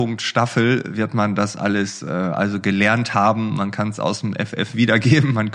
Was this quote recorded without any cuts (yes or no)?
yes